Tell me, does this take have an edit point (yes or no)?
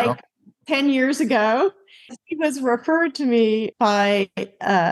yes